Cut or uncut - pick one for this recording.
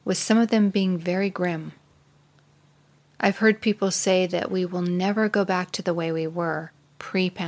uncut